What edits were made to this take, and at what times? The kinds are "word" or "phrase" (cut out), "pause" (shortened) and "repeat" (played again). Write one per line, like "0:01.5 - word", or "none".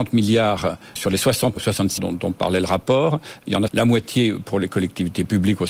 0:01.0 - word
0:01.6 - word
0:02.0 - word
0:03.7 - word